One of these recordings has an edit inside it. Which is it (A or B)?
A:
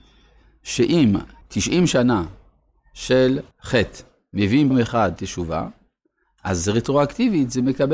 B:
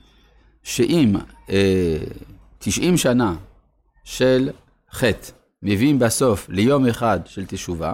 A